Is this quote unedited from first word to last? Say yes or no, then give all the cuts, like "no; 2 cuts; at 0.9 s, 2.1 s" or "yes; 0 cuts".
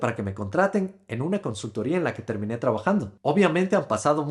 yes; 0 cuts